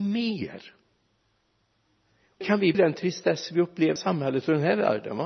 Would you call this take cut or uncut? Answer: cut